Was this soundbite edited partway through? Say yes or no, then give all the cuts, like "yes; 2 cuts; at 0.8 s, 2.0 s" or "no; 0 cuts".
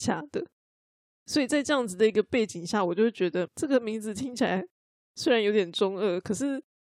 yes; 1 cut; at 3.5 s